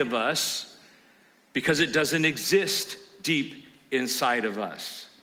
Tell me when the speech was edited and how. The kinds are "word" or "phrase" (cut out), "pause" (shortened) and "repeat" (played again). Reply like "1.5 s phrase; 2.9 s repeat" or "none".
none